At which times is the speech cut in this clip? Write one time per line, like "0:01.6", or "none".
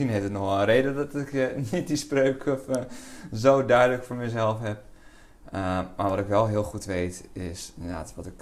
none